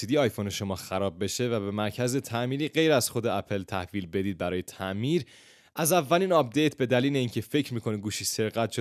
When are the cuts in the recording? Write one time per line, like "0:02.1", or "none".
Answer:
none